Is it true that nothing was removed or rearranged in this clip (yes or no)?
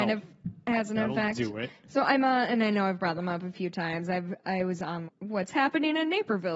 no